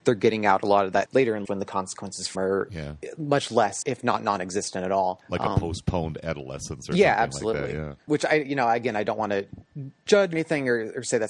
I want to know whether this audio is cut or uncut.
cut